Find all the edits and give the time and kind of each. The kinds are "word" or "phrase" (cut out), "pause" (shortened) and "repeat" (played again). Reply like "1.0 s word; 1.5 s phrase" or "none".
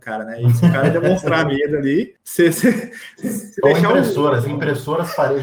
none